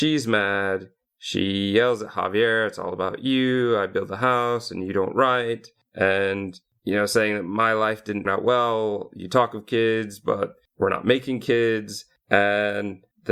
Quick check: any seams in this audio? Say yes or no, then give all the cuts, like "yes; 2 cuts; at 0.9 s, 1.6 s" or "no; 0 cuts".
yes; 1 cut; at 8.3 s